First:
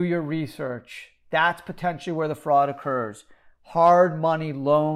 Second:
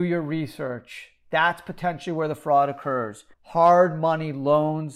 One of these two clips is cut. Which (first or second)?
second